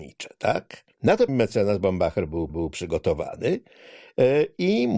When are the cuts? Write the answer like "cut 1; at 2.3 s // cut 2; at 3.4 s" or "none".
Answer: cut 1; at 0.9 s // cut 2; at 1.3 s // cut 3; at 2.5 s